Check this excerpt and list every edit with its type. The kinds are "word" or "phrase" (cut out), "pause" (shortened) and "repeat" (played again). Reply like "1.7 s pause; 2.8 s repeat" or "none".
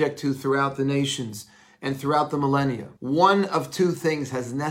3.0 s pause